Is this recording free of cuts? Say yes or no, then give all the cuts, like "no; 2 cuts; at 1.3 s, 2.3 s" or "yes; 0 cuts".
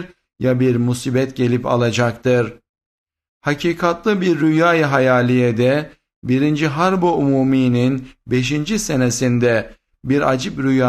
yes; 0 cuts